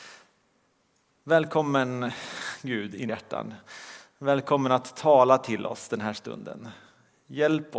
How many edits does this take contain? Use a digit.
1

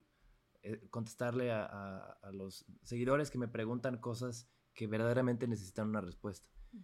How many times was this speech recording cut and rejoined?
0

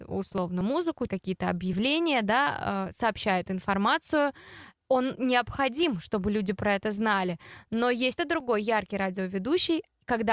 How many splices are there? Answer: 2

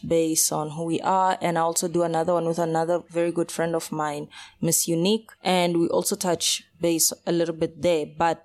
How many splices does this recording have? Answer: 2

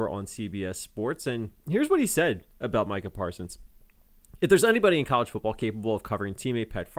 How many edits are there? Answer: 0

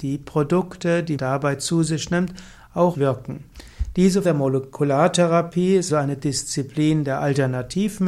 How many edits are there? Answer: 4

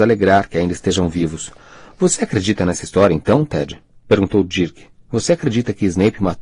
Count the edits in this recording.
0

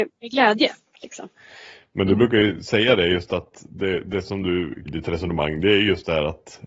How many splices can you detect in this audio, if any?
1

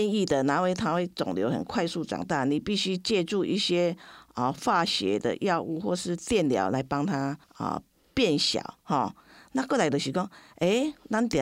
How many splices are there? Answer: 2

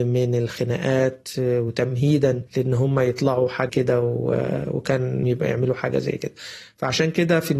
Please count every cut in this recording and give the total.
3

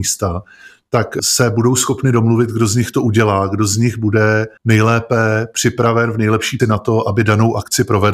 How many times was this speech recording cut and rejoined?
2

